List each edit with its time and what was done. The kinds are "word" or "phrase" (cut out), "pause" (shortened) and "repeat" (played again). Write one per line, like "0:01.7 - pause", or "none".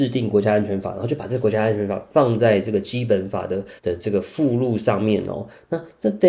0:03.8 - pause

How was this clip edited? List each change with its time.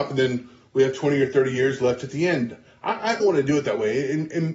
0:03.2 - phrase

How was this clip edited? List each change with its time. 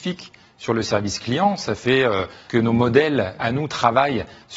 0:02.5 - phrase
0:03.4 - word

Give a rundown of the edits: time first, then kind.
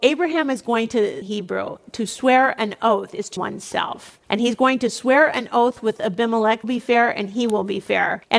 0:01.2 - phrase
0:03.4 - word
0:06.6 - phrase

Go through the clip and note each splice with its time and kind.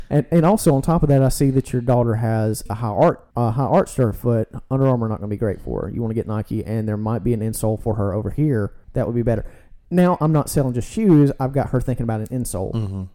0:03.3 - pause
0:08.8 - pause
0:09.8 - pause

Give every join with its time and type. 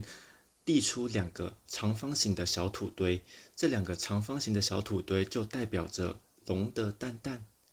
0:06.3 - pause

